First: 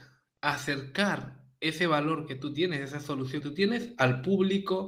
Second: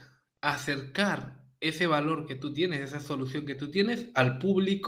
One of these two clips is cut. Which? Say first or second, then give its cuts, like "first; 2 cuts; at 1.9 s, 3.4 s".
first; 1 cut; at 3.4 s